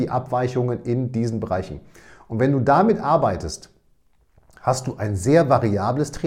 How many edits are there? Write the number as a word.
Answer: zero